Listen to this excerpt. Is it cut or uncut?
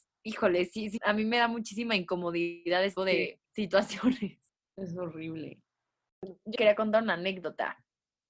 cut